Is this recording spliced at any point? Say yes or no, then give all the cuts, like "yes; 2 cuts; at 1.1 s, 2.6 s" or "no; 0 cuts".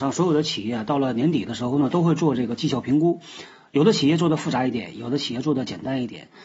no; 0 cuts